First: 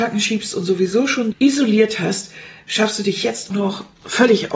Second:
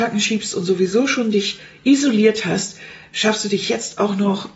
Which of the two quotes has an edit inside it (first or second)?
first